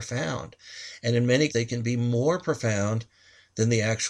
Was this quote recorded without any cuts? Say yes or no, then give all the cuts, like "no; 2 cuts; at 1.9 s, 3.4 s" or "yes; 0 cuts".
no; 1 cut; at 1.5 s